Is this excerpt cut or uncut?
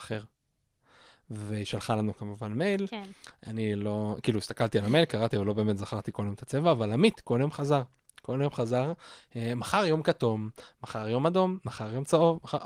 uncut